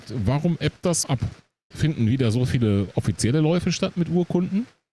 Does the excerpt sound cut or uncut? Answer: cut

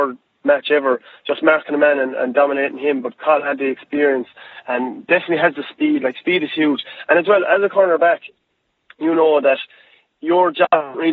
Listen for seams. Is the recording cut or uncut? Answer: uncut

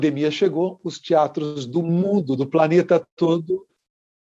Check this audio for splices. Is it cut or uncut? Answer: uncut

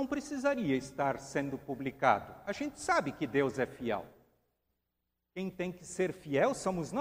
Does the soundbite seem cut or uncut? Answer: uncut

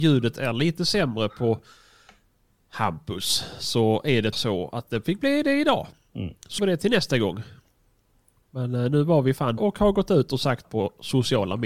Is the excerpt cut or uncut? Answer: cut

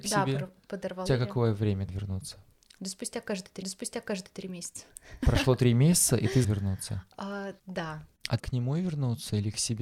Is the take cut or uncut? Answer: cut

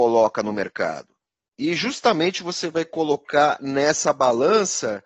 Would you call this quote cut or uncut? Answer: uncut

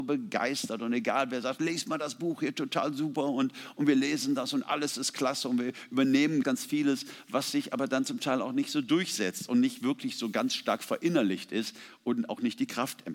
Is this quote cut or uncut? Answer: cut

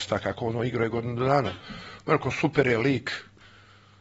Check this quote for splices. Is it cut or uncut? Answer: uncut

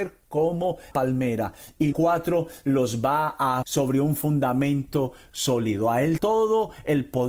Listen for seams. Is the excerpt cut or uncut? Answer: cut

